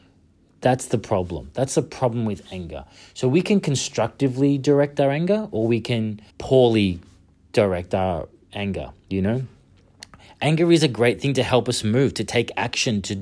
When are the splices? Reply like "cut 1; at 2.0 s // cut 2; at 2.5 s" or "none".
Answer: cut 1; at 6.3 s